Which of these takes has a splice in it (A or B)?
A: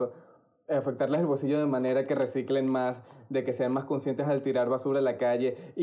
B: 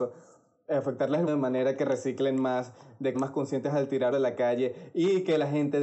B